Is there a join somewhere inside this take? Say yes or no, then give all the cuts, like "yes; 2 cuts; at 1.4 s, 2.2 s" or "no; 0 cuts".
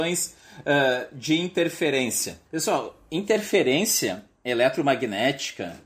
yes; 1 cut; at 2.5 s